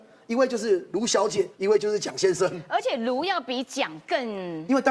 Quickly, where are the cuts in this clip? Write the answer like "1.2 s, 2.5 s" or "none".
1.5 s